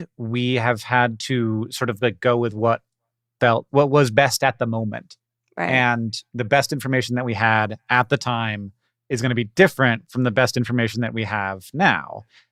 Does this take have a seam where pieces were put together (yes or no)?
yes